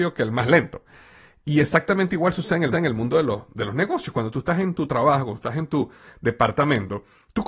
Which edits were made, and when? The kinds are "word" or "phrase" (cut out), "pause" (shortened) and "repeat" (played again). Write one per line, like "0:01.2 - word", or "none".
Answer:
0:02.7 - repeat